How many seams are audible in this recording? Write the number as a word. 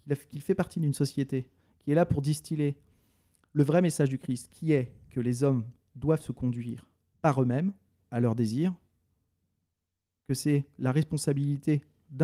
two